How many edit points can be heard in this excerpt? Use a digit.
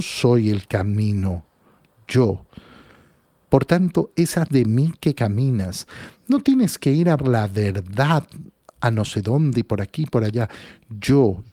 2